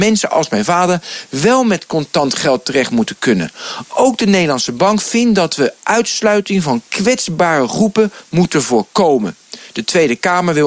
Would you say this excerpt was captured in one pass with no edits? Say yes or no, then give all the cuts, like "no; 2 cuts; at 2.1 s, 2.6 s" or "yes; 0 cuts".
yes; 0 cuts